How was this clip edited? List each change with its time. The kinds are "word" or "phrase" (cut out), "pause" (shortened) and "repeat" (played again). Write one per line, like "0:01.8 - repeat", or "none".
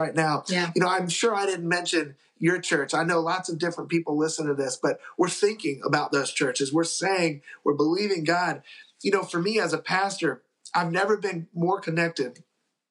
none